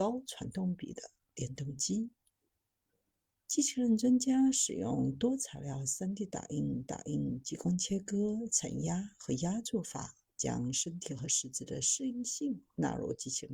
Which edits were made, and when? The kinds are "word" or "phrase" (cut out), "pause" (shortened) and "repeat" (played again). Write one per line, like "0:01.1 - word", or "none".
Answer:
0:06.9 - repeat